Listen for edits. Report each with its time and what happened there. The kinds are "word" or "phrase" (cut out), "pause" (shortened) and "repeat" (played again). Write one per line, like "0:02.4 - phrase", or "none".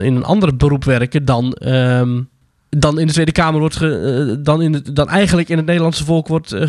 0:02.4 - pause